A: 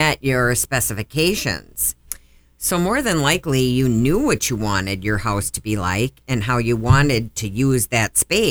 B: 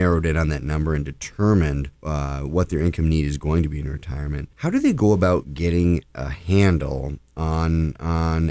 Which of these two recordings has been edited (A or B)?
B